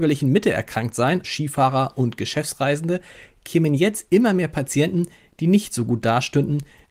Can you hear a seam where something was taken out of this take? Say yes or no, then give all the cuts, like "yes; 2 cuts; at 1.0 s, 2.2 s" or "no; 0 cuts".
yes; 1 cut; at 1.2 s